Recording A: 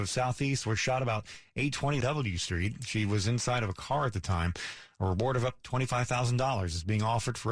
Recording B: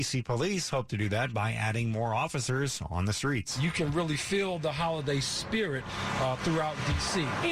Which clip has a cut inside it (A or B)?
A